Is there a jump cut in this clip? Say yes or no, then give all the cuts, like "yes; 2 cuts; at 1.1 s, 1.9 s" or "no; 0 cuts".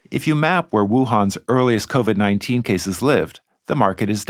no; 0 cuts